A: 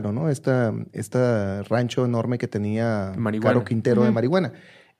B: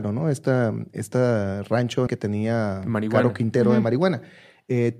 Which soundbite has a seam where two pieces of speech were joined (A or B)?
B